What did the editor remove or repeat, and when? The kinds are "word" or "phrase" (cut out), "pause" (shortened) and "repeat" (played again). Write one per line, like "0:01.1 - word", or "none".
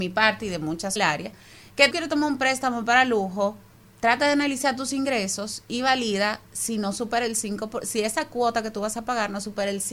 0:01.0 - phrase
0:01.9 - phrase
0:03.7 - pause